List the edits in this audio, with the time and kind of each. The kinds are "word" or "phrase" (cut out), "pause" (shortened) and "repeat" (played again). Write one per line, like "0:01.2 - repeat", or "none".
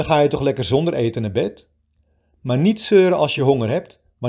none

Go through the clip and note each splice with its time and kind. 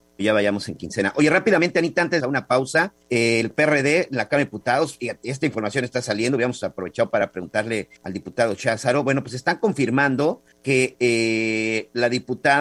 0:02.2 - phrase
0:03.0 - pause
0:08.0 - pause
0:10.5 - pause

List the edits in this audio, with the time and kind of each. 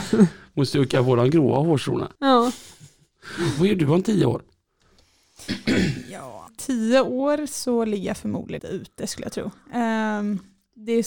0:02.2 - pause
0:06.5 - word
0:08.6 - word

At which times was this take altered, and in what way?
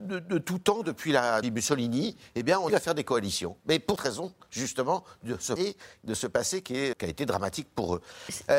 0:01.4 - word
0:02.7 - word
0:04.0 - word
0:05.6 - word
0:06.9 - word

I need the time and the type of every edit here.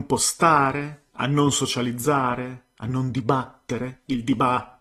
none

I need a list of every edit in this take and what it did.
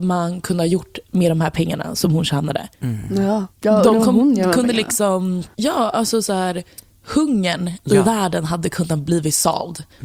0:02.7 - pause
0:03.5 - pause

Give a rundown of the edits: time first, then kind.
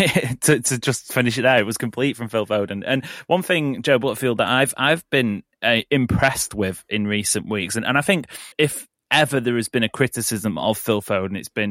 0:08.5 - pause

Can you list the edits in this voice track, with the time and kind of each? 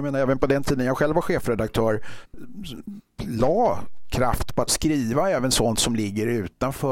0:04.7 - phrase

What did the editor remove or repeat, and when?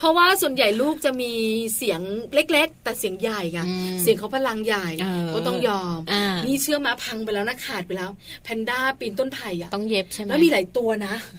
none

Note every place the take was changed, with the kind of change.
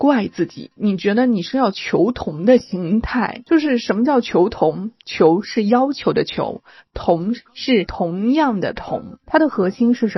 none

